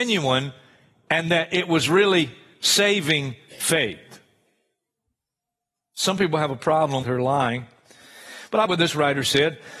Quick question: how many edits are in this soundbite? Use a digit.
2